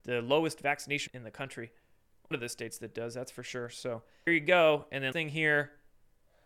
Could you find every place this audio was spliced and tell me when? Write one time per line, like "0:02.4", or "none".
0:01.1
0:02.3
0:04.3
0:05.1